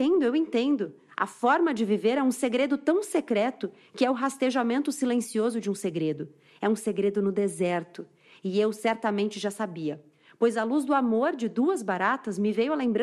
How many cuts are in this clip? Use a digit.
0